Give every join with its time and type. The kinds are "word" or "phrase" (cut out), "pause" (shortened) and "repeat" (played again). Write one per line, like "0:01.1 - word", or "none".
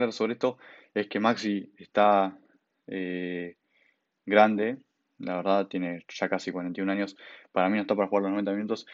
none